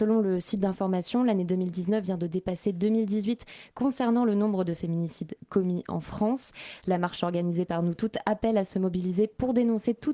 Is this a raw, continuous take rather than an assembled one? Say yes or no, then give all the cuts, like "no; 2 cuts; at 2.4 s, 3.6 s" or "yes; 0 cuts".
yes; 0 cuts